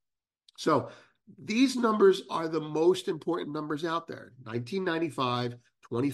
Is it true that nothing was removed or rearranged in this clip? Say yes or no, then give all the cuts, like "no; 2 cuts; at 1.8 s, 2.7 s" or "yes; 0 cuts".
yes; 0 cuts